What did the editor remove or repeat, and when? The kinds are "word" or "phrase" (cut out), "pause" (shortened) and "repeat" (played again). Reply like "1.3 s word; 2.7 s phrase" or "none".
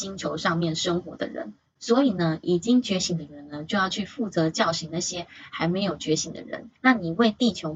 6.8 s pause

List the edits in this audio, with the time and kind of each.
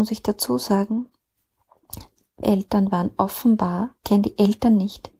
2.4 s word; 4.0 s phrase

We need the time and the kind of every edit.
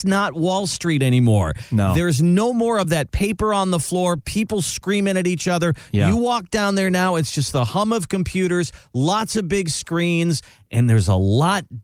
none

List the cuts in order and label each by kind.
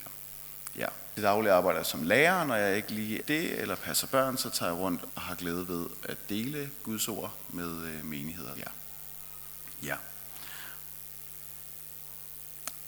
1.2 s phrase; 3.2 s word; 5.1 s word; 8.6 s word

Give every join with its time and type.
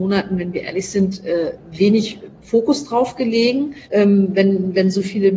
2.4 s pause; 3.8 s pause

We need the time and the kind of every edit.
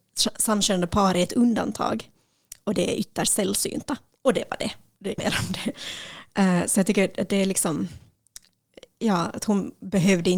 5.2 s word

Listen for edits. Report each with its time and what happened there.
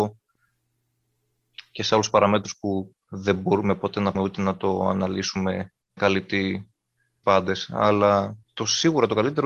4.1 s word; 6.0 s word; 7.2 s word; 8.4 s pause

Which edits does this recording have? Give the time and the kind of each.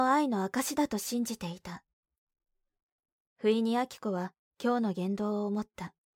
none

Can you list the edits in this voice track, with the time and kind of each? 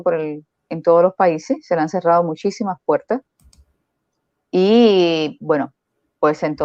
none

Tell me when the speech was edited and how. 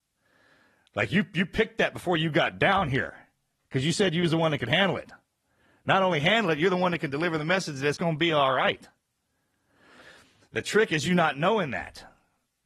none

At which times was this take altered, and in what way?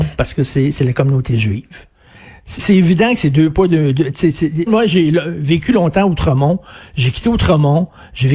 2.6 s word; 4.7 s word

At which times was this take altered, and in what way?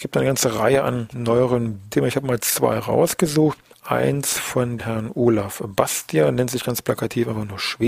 1.1 s word; 1.9 s phrase; 4.8 s word

